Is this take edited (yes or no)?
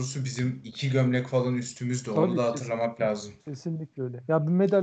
yes